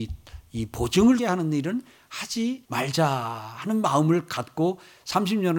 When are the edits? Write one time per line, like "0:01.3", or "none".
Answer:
0:01.2
0:02.6